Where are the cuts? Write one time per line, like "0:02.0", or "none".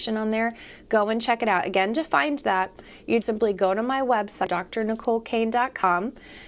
0:03.2